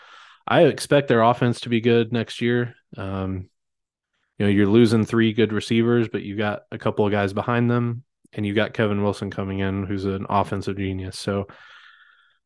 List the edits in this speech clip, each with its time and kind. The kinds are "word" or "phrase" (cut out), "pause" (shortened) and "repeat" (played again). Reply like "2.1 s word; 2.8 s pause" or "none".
none